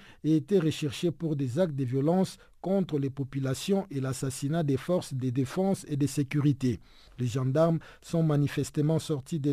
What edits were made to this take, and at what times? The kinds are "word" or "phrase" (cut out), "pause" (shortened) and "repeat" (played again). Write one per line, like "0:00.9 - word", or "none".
none